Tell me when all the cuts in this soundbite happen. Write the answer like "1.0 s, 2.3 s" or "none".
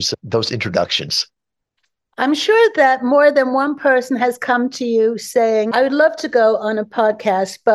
none